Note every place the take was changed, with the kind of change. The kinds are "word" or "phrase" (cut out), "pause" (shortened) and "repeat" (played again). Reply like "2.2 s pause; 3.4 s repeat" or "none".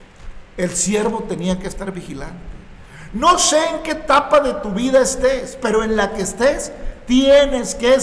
none

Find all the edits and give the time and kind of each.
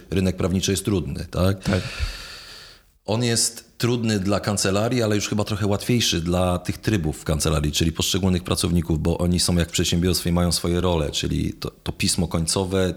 none

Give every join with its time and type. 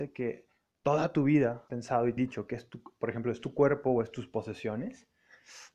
1.7 s word; 2.2 s word

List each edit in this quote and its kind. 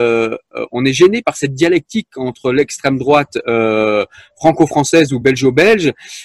none

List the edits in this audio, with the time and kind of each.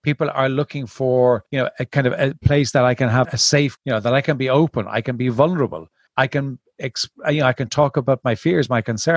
1.5 s pause; 3.2 s word; 3.8 s word; 6.1 s pause

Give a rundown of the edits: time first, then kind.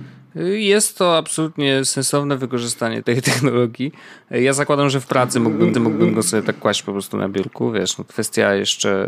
3.0 s word; 5.7 s repeat; 8.1 s word

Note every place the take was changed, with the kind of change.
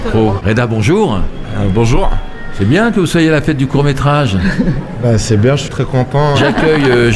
5.7 s word

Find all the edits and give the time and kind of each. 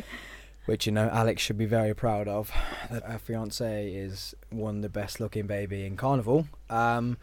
3.0 s word

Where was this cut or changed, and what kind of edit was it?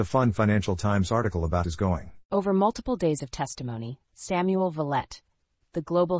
1.6 s phrase

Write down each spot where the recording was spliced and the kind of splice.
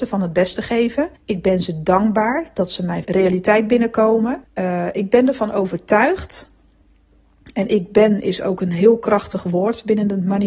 1.2 s pause; 3.0 s word; 4.4 s pause

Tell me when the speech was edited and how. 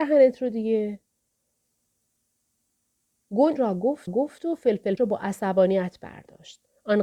3.6 s word; 4.1 s repeat; 5.0 s word

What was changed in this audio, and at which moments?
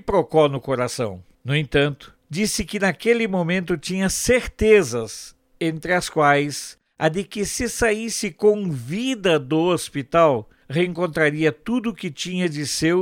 none

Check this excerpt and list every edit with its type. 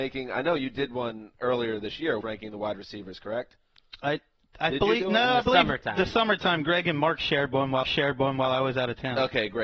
2.2 s word; 7.8 s repeat

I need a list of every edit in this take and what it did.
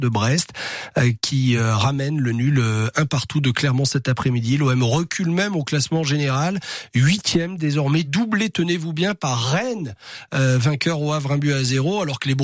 none

